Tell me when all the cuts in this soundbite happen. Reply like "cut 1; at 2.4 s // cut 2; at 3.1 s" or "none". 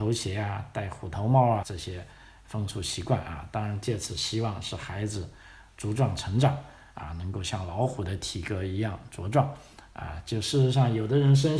cut 1; at 1.6 s